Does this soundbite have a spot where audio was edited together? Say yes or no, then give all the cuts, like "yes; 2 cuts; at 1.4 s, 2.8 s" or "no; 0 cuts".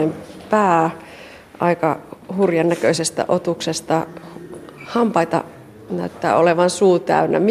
no; 0 cuts